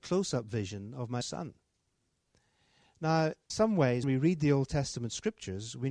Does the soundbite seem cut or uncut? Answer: cut